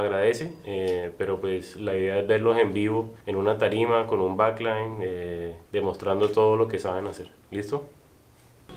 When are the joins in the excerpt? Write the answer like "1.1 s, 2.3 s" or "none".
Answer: 3.2 s, 5.7 s